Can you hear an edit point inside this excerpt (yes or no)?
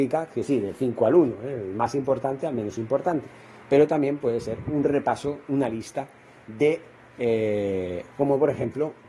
no